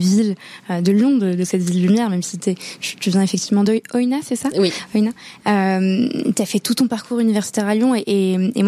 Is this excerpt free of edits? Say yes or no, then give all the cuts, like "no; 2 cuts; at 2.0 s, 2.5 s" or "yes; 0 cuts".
yes; 0 cuts